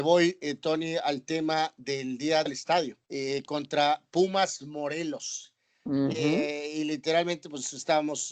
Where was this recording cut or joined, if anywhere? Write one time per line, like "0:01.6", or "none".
0:02.5
0:03.0